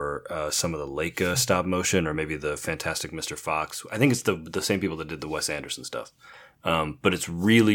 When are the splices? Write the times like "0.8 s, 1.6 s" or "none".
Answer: none